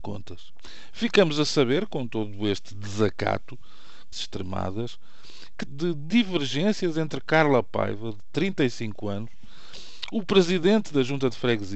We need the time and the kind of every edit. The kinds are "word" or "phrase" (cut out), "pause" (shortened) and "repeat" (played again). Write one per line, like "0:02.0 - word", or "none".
0:04.1 - word
0:05.7 - phrase